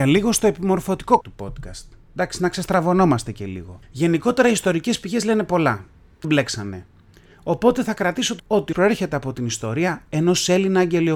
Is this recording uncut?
no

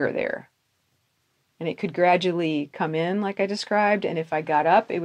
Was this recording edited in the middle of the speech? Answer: no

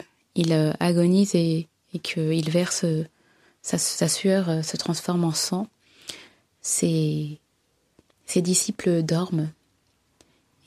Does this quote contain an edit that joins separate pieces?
no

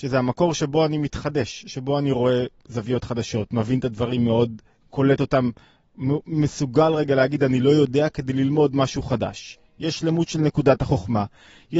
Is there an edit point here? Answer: yes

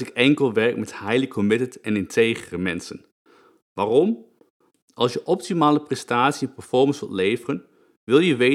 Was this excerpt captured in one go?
yes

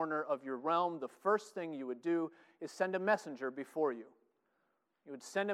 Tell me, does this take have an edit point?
no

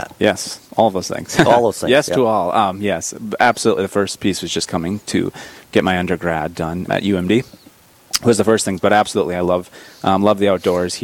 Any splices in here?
yes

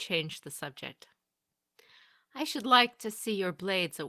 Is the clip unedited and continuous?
yes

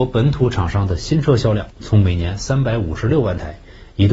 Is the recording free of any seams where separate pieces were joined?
no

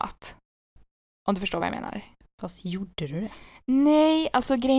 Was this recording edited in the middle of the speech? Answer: no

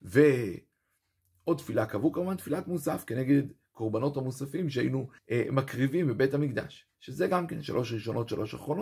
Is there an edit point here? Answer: yes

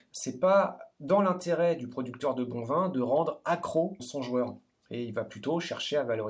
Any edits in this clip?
yes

